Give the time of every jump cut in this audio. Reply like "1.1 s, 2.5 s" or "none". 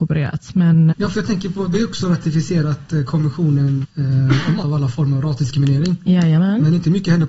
0.9 s, 1.7 s, 3.8 s, 4.6 s